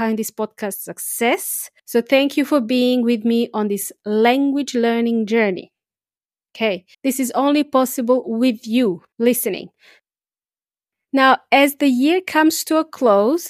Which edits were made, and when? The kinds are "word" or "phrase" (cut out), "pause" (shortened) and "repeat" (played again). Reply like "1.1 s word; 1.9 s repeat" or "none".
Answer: 1.8 s pause; 6.9 s pause; 9.1 s pause